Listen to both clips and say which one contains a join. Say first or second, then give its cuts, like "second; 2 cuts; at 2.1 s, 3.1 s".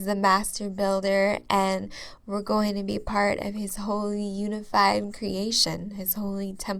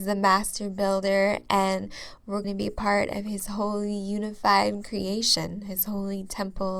second; 1 cut; at 2.4 s